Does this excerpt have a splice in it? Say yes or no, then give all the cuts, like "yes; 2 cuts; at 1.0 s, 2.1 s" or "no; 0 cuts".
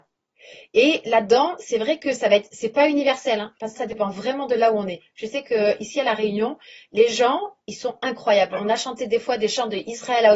yes; 1 cut; at 3.8 s